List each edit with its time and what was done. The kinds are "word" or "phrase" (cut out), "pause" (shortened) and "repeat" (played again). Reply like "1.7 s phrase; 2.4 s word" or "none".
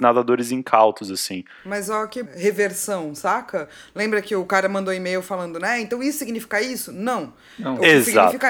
2.3 s word